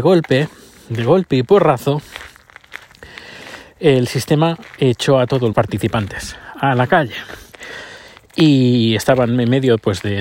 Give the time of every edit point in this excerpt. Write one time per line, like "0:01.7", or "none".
0:05.5